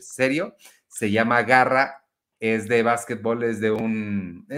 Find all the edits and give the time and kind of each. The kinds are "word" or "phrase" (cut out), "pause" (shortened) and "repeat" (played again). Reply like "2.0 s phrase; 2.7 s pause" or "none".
none